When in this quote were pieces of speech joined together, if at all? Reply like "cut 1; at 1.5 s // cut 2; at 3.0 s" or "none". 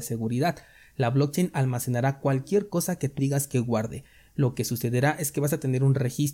cut 1; at 3.2 s

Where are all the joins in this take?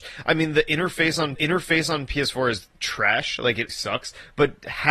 cut 1; at 1.4 s // cut 2; at 2.8 s // cut 3; at 3.7 s

